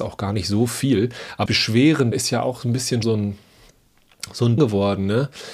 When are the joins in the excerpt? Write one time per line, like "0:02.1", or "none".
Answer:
0:01.5
0:02.1
0:03.0
0:04.6

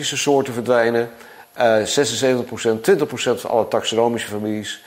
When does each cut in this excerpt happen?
none

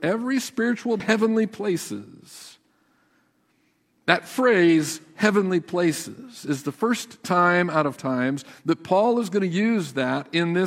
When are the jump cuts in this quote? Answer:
0:01.0
0:08.0

